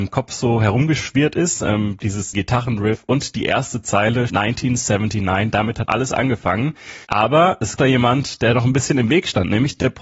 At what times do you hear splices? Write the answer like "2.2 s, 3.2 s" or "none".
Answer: 2.3 s, 4.3 s, 5.9 s, 7.0 s, 7.8 s